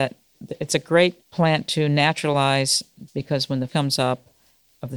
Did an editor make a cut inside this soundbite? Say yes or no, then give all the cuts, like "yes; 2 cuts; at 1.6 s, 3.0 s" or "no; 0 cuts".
yes; 3 cuts; at 1.2 s, 3.1 s, 3.7 s